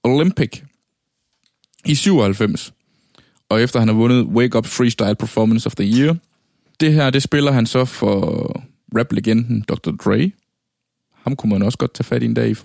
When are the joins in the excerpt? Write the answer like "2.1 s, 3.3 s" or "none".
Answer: 4.6 s

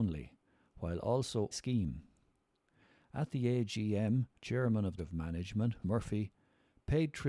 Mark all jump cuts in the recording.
1.5 s, 4.4 s, 5.0 s, 5.8 s

